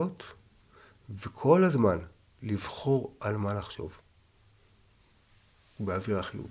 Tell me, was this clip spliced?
no; 0 cuts

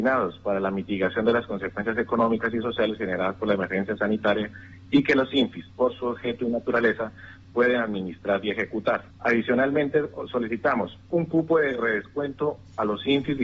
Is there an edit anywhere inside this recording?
yes; 2 cuts; at 9.1 s, 11.1 s

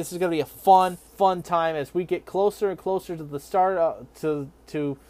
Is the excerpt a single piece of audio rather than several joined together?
no; 1 cut; at 1.1 s

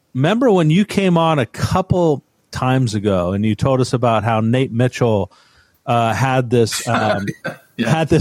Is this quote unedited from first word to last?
yes; 0 cuts

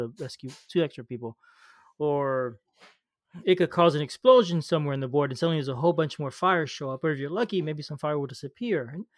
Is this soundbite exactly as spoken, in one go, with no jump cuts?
yes; 0 cuts

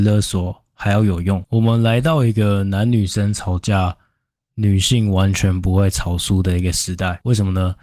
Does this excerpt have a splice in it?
no; 0 cuts

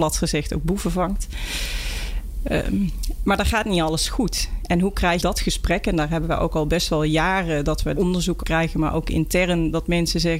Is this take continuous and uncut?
no; 3 cuts; at 5.2 s, 8.0 s, 8.4 s

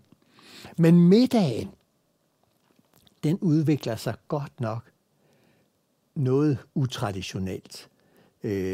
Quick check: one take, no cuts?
yes; 0 cuts

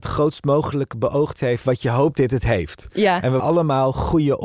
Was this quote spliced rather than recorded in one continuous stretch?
yes; 3 cuts; at 1.4 s, 2.1 s, 3.4 s

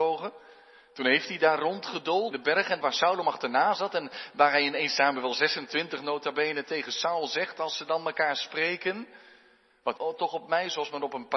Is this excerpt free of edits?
no; 3 cuts; at 2.3 s, 2.8 s, 10.0 s

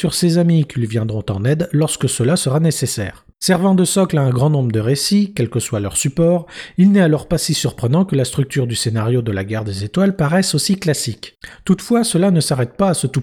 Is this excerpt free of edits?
no; 1 cut; at 3.3 s

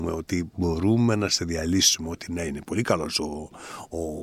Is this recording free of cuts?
yes; 0 cuts

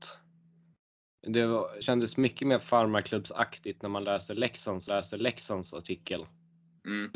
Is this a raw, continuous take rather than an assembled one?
no; 2 cuts; at 1.8 s, 4.9 s

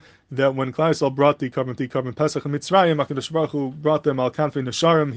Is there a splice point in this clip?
yes; 1 cut; at 1.8 s

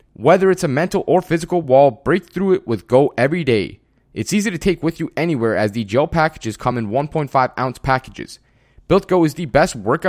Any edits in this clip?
no; 0 cuts

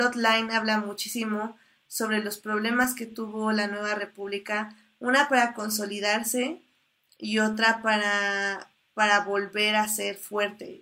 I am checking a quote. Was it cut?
no; 0 cuts

